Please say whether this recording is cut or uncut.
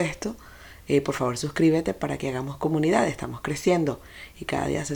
uncut